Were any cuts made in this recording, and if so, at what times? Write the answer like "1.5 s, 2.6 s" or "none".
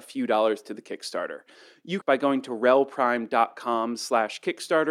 2.0 s